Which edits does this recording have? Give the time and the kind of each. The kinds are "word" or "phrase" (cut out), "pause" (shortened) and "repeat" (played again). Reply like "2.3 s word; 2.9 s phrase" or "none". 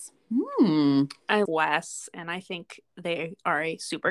1.5 s word; 2.9 s pause